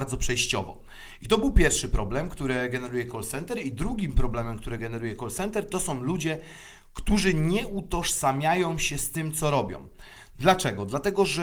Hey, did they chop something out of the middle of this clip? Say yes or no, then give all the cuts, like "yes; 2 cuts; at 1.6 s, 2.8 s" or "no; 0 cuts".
no; 0 cuts